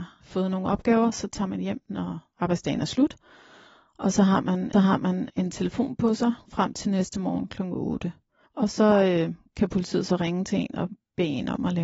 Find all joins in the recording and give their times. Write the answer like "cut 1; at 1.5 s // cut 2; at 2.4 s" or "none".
cut 1; at 4.7 s